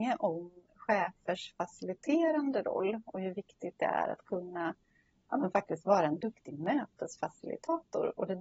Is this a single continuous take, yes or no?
yes